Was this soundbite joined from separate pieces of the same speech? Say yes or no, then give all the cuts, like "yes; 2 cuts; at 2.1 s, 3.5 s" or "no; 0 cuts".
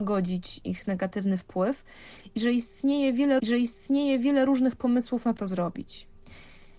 yes; 2 cuts; at 3.4 s, 5.4 s